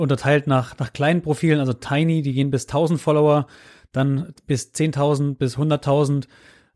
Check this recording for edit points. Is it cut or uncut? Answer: uncut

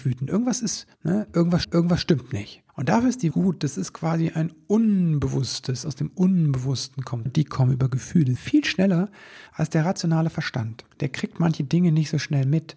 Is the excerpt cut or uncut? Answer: cut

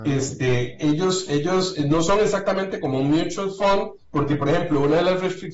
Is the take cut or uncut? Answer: cut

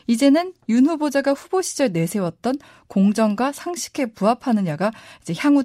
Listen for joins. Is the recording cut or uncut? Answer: uncut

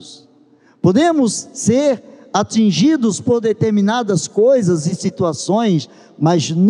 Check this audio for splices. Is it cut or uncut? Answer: uncut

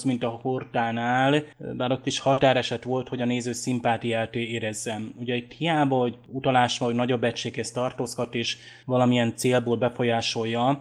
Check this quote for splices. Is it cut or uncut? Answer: uncut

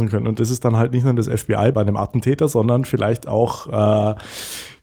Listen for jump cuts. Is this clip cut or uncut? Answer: cut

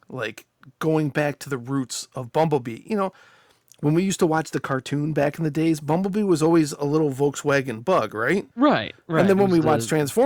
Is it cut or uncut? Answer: cut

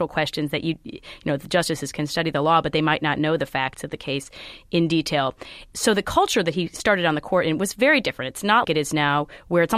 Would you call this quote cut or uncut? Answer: cut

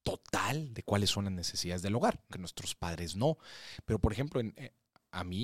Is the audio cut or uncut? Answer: cut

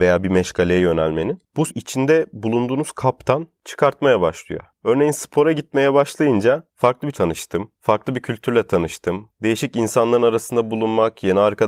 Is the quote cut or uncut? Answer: cut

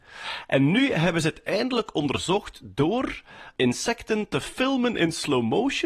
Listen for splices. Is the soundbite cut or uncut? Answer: uncut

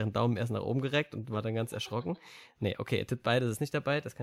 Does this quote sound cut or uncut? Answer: uncut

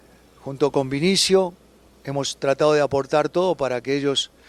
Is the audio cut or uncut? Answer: uncut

